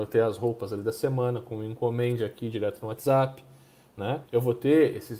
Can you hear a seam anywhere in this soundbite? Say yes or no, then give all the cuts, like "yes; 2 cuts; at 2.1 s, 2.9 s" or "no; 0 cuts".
yes; 1 cut; at 4.3 s